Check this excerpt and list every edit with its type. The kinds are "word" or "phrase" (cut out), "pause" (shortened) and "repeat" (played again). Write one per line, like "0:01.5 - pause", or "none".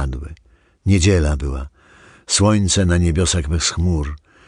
none

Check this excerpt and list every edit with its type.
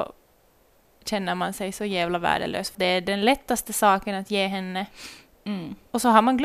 0:02.7 - word

